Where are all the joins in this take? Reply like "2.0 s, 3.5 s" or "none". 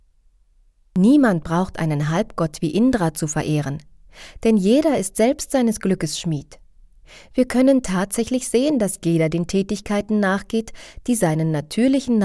none